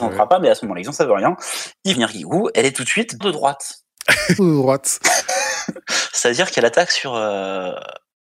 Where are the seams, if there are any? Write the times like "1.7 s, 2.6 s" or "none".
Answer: 1.9 s, 2.5 s, 3.2 s, 4.4 s

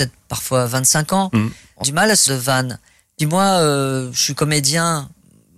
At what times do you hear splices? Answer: 1.8 s, 2.3 s, 3.2 s

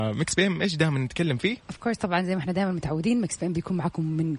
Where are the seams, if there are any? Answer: none

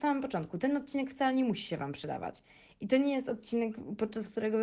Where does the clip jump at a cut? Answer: none

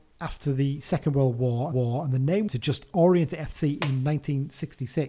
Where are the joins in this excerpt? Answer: 1.7 s, 2.5 s

